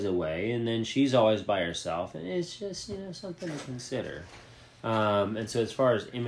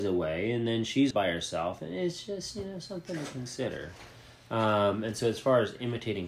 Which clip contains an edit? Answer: second; 1 cut; at 1.1 s

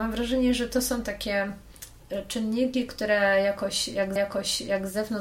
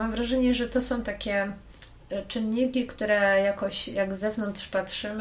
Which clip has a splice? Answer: first; 1 cut; at 4.2 s

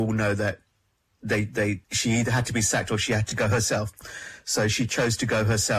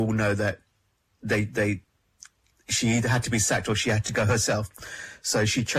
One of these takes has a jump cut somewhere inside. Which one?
first; 1 cut; at 1.8 s

